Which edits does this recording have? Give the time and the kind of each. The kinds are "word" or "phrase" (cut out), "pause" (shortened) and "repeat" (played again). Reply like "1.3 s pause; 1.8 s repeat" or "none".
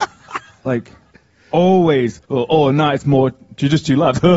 2.2 s pause